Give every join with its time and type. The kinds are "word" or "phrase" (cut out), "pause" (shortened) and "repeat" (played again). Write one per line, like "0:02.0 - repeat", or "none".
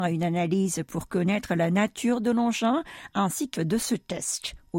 0:03.5 - word